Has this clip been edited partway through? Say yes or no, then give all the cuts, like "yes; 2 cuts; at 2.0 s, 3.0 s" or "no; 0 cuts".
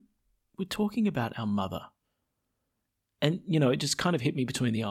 no; 0 cuts